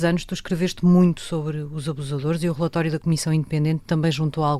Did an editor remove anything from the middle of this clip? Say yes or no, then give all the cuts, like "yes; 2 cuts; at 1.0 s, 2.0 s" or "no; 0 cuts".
no; 0 cuts